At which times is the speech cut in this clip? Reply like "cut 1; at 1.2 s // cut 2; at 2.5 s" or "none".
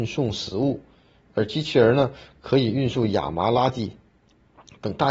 none